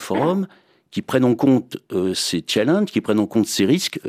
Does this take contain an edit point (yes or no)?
no